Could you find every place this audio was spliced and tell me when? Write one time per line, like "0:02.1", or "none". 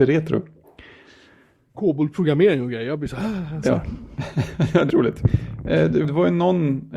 0:04.9
0:06.0